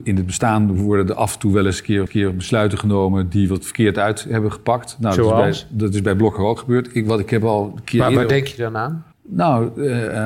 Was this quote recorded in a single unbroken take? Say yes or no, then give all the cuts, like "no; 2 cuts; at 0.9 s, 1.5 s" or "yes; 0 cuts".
no; 2 cuts; at 2.1 s, 9.1 s